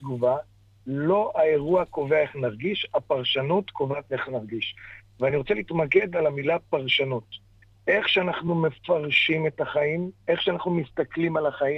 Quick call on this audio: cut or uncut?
uncut